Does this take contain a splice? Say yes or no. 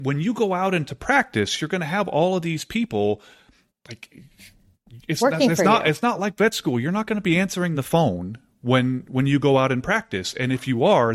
no